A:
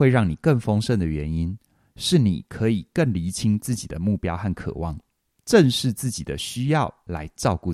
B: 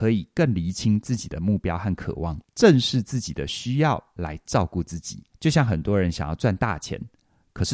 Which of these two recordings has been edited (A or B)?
B